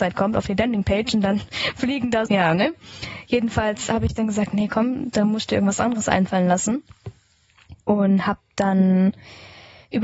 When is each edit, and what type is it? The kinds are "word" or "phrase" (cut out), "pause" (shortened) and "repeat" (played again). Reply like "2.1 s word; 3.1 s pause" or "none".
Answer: 2.3 s word; 7.8 s pause